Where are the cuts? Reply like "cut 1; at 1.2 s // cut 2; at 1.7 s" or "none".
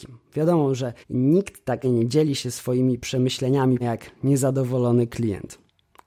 cut 1; at 1.0 s // cut 2; at 1.8 s // cut 3; at 3.8 s